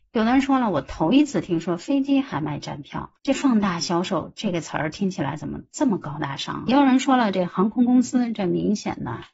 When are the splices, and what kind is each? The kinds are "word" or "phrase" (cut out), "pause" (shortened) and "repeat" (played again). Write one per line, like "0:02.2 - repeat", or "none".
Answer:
0:03.2 - pause